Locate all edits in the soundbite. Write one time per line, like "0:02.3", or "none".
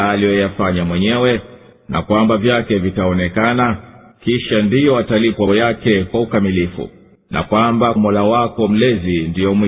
0:01.7
0:02.4
0:04.1
0:05.5
0:07.2
0:08.0